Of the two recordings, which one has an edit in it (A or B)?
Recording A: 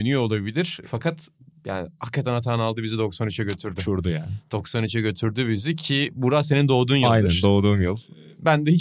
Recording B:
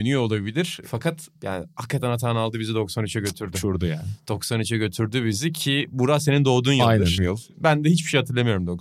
B